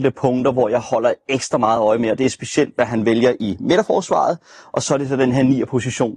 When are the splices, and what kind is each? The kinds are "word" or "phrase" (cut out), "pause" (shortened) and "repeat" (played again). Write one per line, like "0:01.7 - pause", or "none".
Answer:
none